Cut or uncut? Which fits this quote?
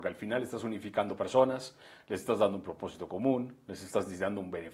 uncut